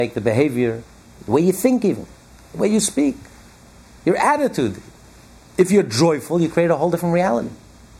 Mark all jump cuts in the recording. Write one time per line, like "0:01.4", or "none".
none